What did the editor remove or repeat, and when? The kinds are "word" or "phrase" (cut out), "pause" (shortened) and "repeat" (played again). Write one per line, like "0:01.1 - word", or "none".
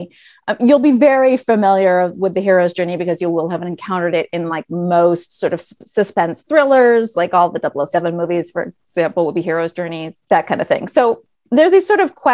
none